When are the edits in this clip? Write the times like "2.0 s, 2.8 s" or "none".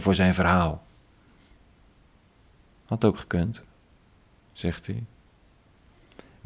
none